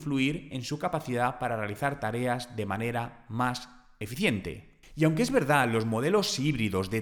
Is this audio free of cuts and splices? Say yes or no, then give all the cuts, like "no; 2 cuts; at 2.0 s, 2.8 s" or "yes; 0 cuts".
yes; 0 cuts